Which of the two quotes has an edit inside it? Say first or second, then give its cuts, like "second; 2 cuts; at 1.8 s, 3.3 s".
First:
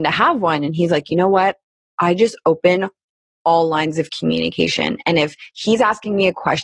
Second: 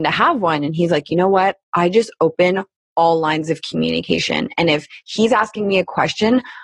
second; 2 cuts; at 1.6 s, 2.8 s